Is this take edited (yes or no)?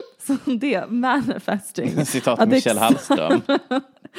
no